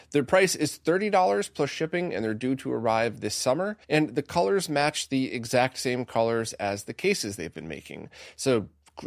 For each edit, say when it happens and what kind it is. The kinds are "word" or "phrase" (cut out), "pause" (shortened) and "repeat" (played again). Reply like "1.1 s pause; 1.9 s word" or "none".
3.8 s pause